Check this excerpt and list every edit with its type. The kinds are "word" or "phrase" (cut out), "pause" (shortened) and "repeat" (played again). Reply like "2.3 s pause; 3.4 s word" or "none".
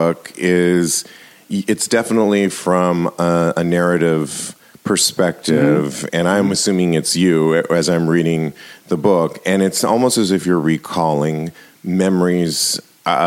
none